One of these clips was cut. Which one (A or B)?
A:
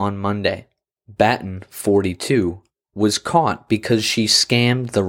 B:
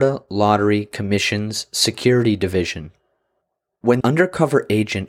B